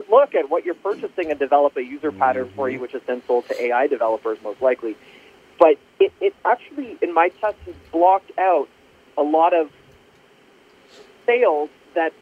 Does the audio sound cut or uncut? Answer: uncut